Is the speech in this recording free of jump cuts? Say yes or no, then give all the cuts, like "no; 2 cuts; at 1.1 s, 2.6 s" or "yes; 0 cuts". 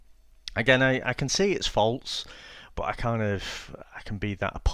yes; 0 cuts